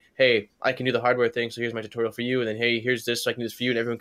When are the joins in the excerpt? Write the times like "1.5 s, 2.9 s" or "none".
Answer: none